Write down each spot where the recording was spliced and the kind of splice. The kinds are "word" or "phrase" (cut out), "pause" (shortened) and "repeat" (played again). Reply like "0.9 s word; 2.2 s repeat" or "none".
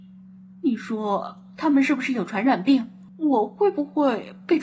3.1 s pause